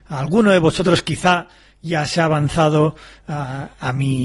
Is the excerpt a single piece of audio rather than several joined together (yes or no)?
yes